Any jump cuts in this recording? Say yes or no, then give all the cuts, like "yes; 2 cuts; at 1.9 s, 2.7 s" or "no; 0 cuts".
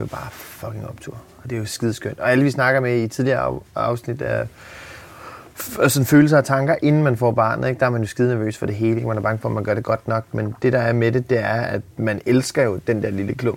yes; 1 cut; at 11.9 s